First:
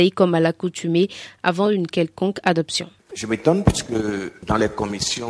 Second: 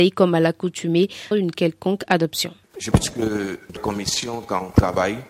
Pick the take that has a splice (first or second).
second